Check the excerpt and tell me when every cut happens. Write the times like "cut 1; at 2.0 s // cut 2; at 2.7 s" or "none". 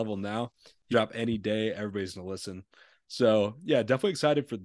cut 1; at 0.9 s